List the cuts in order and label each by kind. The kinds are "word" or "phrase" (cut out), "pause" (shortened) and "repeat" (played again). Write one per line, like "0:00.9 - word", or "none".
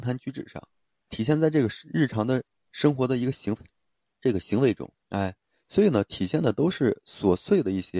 0:01.1 - word
0:05.0 - pause